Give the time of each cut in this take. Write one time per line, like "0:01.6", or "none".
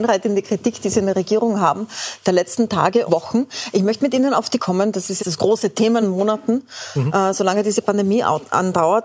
0:03.1
0:04.6
0:05.2
0:06.0